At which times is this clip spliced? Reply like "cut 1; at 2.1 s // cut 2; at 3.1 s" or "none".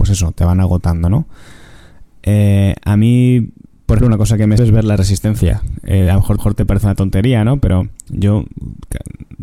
cut 1; at 4.0 s // cut 2; at 4.6 s // cut 3; at 6.4 s